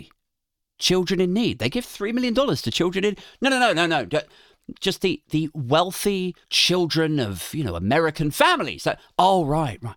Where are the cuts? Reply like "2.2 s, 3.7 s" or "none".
6.4 s